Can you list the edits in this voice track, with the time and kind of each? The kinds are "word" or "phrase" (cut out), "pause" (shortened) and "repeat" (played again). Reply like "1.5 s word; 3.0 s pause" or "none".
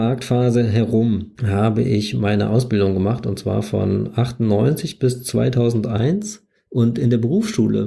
1.4 s pause; 6.5 s pause